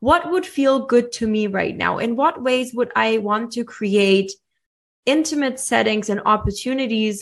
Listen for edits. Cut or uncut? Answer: uncut